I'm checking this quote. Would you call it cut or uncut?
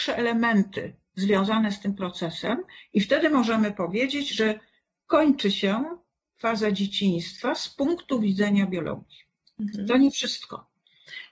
uncut